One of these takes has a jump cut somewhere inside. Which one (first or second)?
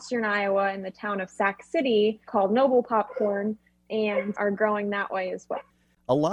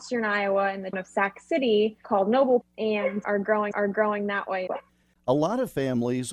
second